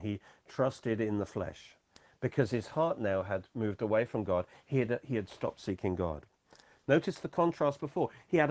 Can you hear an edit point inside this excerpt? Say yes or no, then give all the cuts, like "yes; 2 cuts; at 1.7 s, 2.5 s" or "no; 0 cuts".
no; 0 cuts